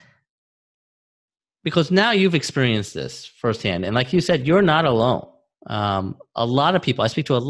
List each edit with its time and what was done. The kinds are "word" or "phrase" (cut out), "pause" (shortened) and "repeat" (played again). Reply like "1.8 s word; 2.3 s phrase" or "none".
none